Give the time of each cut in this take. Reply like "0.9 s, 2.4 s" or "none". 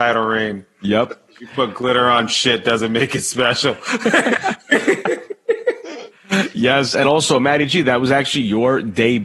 none